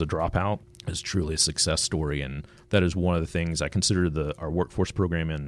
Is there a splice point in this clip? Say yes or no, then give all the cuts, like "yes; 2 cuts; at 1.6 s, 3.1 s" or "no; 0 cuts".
no; 0 cuts